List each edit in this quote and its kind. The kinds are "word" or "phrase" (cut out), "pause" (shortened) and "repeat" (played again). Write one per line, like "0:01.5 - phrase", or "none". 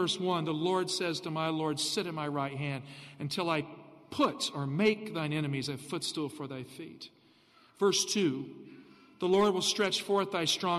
none